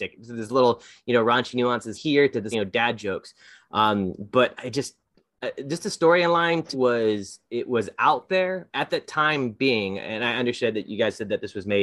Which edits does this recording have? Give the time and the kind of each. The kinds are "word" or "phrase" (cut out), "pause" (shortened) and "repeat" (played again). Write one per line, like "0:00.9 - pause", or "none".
0:01.9 - word
0:02.5 - word
0:04.6 - word
0:06.7 - word
0:08.7 - word